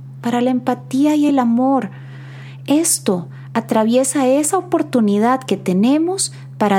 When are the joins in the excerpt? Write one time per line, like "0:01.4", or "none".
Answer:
none